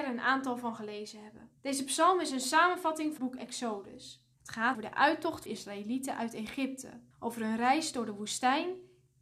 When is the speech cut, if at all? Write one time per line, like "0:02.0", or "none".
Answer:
0:01.6
0:03.2
0:04.3
0:04.7
0:05.5
0:07.1